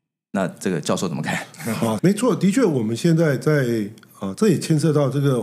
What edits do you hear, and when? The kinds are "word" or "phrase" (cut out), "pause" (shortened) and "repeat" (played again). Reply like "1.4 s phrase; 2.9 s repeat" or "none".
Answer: 2.0 s phrase